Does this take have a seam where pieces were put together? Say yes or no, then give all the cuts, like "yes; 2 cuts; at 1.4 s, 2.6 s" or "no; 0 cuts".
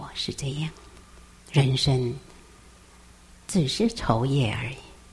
yes; 1 cut; at 1.3 s